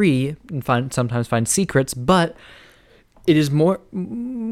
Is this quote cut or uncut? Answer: uncut